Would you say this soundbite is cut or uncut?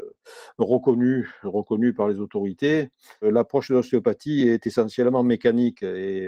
uncut